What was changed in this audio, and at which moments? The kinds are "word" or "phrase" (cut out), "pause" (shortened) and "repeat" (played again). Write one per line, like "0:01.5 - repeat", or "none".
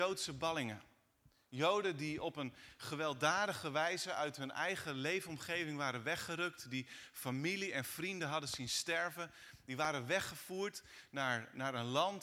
none